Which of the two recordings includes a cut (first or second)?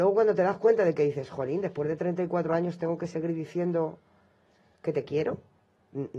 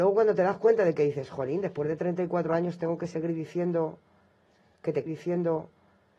second